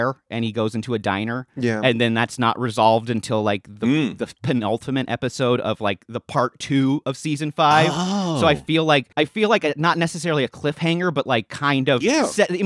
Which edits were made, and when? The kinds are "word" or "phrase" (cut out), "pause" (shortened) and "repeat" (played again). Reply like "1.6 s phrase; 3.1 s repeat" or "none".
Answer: 9.1 s pause